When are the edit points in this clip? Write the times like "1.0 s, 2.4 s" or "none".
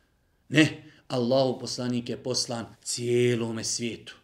2.7 s